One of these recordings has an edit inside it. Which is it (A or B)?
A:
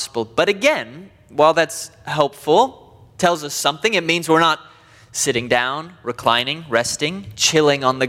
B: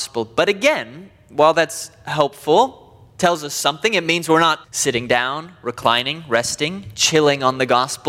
B